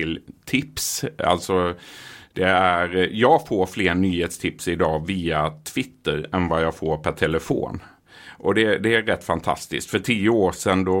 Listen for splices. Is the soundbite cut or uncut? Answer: uncut